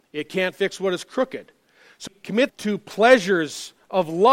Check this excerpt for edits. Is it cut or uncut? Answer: cut